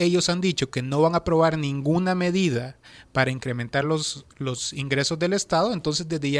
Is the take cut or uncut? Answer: uncut